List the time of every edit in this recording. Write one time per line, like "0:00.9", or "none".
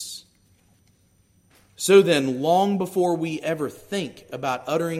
none

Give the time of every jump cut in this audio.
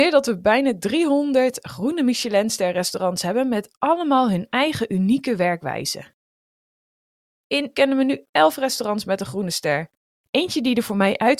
0:07.7

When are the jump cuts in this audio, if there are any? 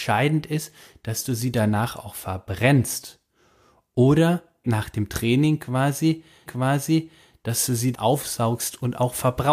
0:04.6
0:06.5
0:07.9

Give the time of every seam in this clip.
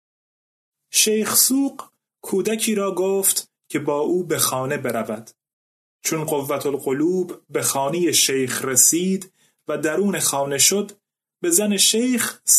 none

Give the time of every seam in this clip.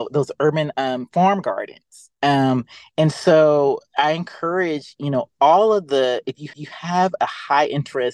0:02.1
0:06.5

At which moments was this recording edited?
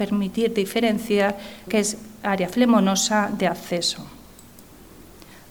0:01.7

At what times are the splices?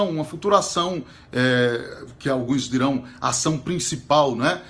none

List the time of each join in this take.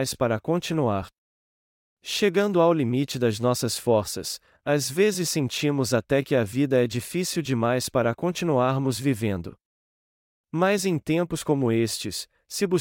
none

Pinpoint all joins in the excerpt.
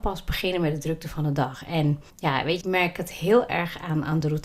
0:02.1
0:02.6

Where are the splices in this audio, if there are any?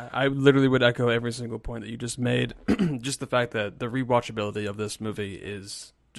none

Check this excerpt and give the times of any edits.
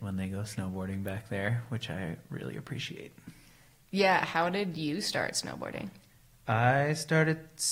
none

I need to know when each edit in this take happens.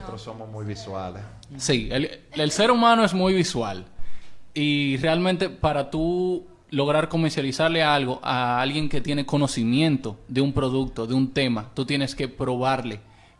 none

